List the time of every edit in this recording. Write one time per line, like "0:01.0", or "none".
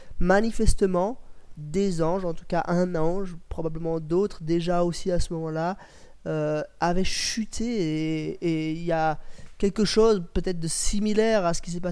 none